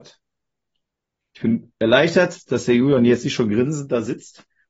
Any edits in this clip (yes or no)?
no